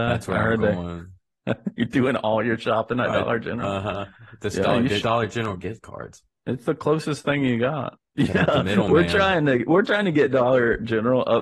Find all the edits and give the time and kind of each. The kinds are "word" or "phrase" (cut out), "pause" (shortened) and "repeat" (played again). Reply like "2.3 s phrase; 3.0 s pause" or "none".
5.0 s word